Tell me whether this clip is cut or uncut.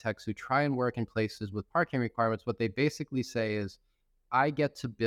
uncut